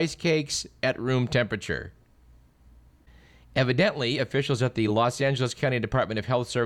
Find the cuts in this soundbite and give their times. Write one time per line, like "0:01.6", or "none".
none